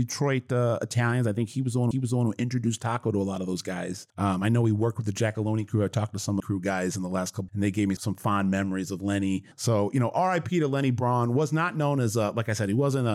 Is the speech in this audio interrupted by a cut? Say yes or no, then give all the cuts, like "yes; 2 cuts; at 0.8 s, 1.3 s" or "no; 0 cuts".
yes; 6 cuts; at 1.9 s, 4.1 s, 6.4 s, 7.5 s, 8.0 s, 9.5 s